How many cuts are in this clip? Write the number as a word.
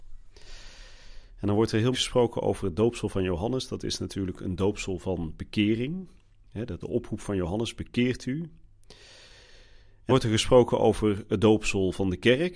three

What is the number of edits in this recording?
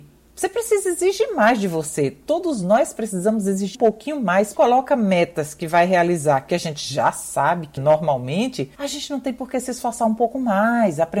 four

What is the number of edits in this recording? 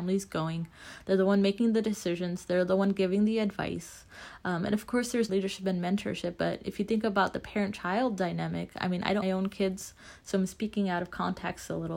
two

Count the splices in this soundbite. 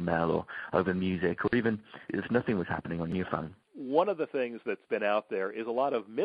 one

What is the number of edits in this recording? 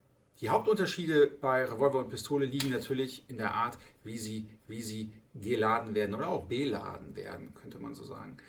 one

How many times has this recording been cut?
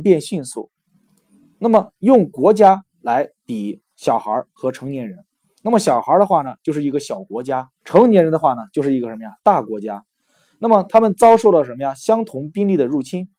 one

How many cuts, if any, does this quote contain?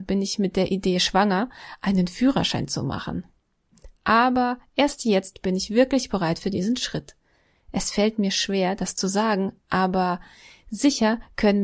zero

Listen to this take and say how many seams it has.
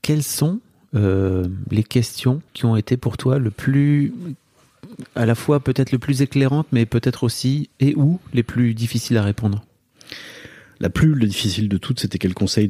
one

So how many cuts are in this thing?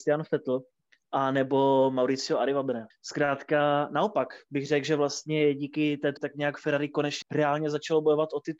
three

